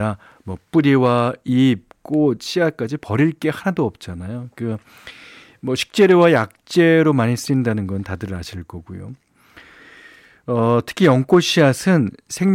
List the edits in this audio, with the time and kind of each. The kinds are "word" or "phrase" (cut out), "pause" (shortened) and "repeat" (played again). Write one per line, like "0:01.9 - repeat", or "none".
none